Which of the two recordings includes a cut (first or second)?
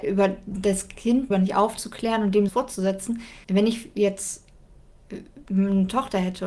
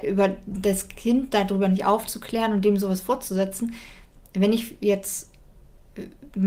first